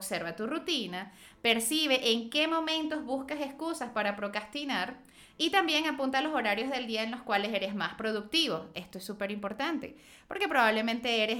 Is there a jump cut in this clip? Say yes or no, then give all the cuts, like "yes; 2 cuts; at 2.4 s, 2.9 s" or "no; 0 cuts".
no; 0 cuts